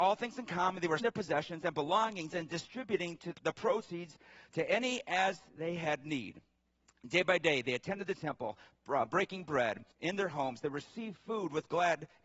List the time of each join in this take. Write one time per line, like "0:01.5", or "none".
0:01.0
0:03.3
0:09.9